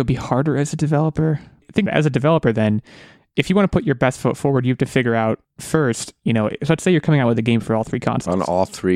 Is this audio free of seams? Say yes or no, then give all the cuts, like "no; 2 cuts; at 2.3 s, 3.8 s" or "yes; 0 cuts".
no; 1 cut; at 1.9 s